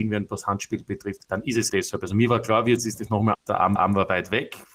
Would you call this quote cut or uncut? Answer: cut